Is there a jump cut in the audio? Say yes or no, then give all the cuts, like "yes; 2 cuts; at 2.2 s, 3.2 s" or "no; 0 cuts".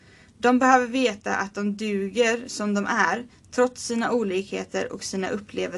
no; 0 cuts